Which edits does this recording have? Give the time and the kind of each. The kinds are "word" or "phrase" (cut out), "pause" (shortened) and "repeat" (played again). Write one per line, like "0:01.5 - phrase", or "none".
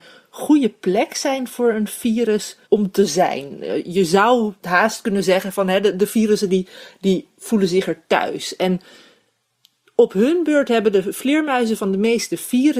0:02.6 - pause
0:04.6 - pause